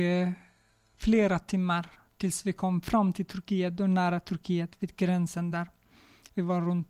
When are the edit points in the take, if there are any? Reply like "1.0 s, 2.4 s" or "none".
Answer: none